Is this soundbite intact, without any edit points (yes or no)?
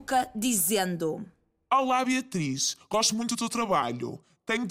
yes